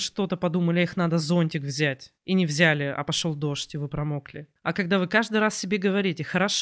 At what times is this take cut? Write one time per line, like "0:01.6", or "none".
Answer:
0:02.2
0:04.6